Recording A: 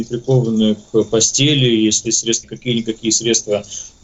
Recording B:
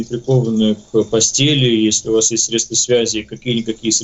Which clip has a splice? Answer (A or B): A